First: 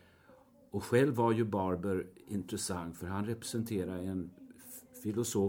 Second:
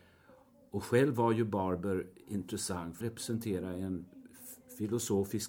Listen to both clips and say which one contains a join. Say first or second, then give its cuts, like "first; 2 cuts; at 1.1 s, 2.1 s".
second; 1 cut; at 3.0 s